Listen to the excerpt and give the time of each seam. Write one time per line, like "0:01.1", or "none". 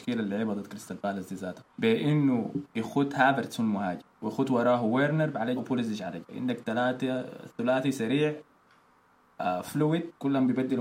0:01.7
0:04.1
0:05.6
0:06.2